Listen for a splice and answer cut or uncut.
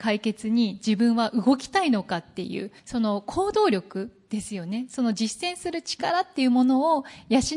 cut